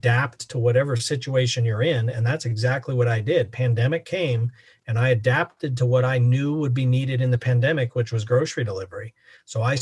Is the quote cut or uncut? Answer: uncut